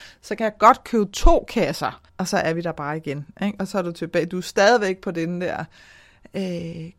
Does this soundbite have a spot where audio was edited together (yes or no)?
yes